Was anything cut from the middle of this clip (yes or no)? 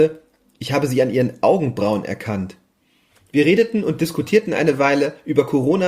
no